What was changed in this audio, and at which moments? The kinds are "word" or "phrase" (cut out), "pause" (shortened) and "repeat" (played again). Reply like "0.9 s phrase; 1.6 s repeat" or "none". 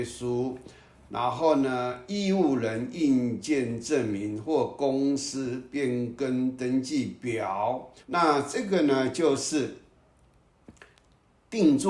8.0 s pause

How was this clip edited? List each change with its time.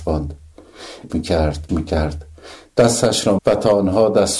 1.1 s word; 1.7 s word; 3.4 s word

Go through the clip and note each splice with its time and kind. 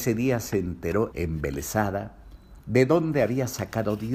1.1 s word

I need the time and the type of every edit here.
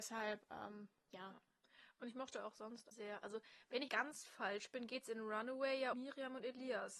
2.9 s word; 3.9 s word; 5.9 s word

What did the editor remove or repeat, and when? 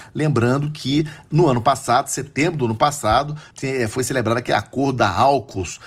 3.5 s pause

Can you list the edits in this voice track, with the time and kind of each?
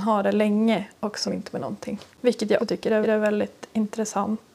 1.2 s phrase; 2.1 s pause; 2.6 s word; 3.0 s repeat

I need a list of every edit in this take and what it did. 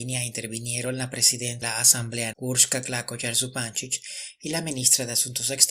1.6 s word; 2.3 s word

